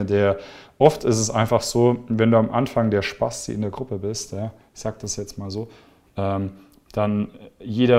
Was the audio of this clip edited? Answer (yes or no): no